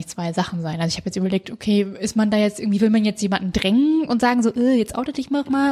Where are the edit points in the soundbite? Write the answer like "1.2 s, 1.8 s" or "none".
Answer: none